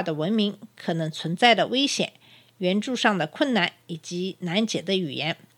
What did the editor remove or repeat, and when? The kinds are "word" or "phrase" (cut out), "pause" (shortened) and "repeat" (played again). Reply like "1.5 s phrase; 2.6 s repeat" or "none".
none